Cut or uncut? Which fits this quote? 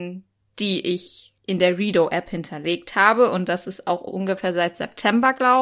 cut